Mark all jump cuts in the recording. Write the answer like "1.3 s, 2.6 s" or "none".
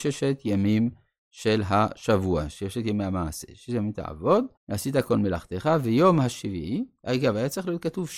4.6 s